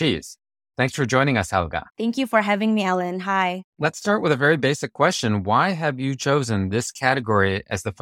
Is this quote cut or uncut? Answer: cut